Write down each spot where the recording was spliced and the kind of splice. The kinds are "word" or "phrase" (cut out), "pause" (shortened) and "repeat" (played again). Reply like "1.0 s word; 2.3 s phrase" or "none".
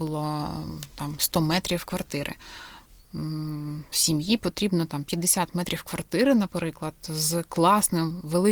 none